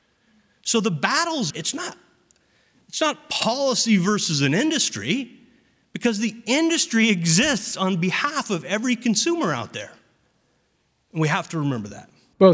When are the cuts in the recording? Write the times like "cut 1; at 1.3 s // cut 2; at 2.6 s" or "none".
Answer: cut 1; at 1.5 s